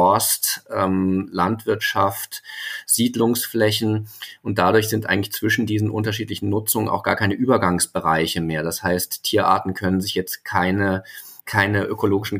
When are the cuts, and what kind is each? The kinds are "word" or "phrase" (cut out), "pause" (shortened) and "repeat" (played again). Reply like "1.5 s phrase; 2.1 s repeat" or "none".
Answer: 11.4 s pause